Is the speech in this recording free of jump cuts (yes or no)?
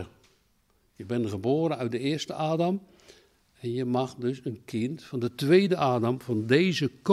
yes